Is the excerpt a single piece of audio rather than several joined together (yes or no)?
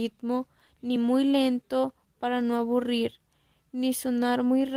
yes